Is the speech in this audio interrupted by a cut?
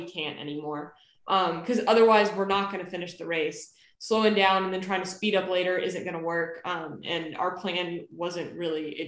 no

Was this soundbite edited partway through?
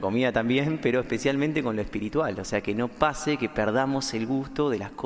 no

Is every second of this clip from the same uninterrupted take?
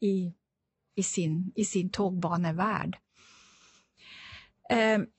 yes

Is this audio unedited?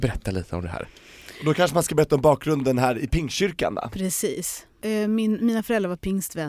yes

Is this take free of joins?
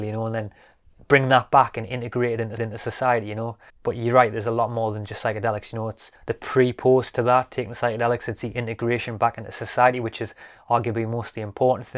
no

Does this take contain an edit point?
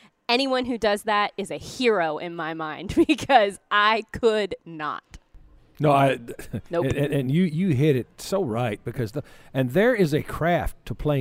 yes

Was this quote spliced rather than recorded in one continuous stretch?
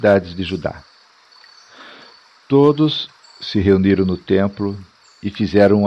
no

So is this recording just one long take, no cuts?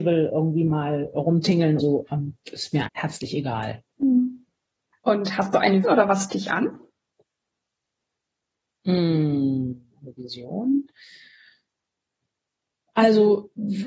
no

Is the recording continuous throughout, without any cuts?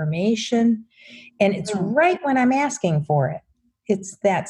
yes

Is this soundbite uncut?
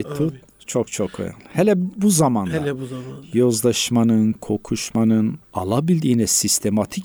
no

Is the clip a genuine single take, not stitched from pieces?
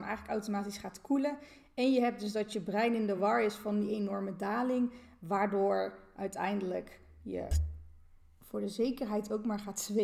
yes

